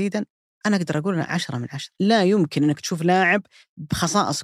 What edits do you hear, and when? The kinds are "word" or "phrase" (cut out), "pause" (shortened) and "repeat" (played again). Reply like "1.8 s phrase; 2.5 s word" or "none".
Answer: 2.0 s pause